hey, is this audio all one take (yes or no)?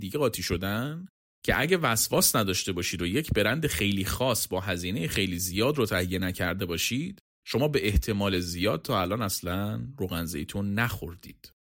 yes